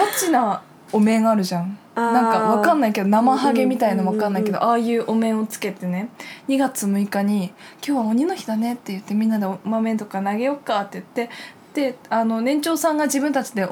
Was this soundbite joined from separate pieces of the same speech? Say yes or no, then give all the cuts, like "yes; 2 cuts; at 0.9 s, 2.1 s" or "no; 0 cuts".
yes; 1 cut; at 1.9 s